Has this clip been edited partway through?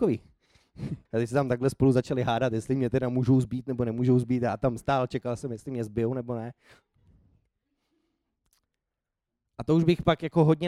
yes; 1 cut; at 1.1 s

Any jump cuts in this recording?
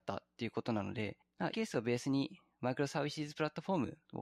yes; 1 cut; at 1.5 s

